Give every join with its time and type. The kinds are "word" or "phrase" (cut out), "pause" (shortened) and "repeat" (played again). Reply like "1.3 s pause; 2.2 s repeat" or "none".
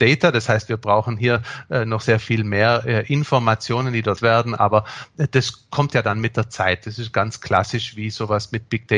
2.0 s word; 4.2 s word

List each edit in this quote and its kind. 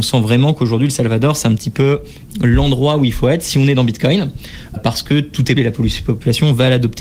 4.8 s word; 5.6 s word

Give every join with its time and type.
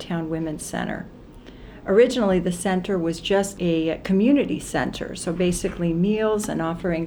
3.6 s word

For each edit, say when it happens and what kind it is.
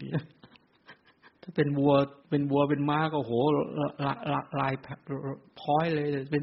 1.4 s pause; 2.2 s pause

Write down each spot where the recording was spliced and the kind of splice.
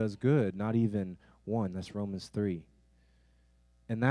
none

